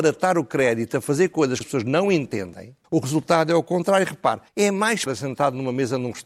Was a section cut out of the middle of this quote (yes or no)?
yes